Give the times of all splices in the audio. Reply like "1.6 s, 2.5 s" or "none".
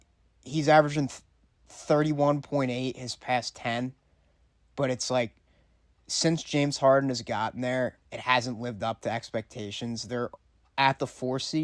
8.1 s